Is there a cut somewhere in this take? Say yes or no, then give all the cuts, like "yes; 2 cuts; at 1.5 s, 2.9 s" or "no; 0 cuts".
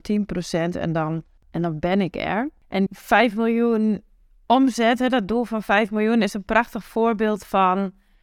yes; 1 cut; at 2.9 s